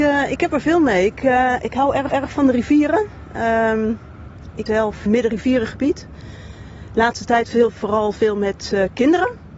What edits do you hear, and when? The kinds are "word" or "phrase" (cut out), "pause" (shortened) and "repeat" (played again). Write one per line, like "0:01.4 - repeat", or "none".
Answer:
0:02.1 - repeat
0:04.7 - word
0:05.1 - phrase